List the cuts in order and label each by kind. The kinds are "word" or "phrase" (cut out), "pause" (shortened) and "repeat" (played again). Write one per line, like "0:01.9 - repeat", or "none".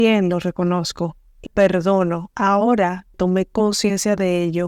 0:01.5 - word
0:03.1 - word